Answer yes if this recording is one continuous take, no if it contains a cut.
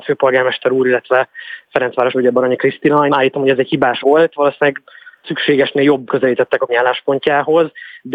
no